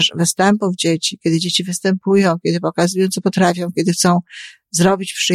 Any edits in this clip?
no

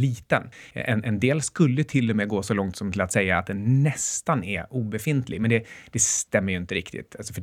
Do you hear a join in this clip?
no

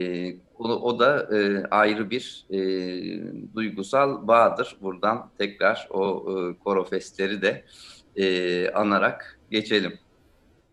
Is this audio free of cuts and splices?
yes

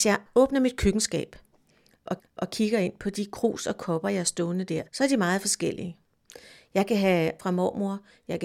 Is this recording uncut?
no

